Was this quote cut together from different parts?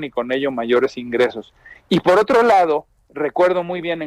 no; 0 cuts

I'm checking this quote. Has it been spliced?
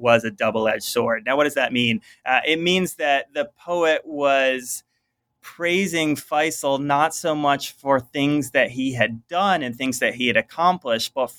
no; 0 cuts

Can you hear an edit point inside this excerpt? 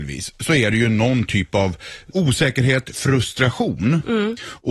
yes; 1 cut; at 2.1 s

